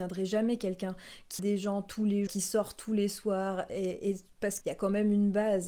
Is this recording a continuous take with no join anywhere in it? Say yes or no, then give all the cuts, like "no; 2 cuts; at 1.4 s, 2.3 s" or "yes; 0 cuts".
no; 3 cuts; at 1.4 s, 2.3 s, 4.6 s